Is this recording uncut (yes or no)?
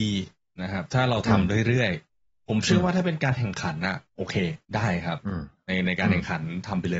no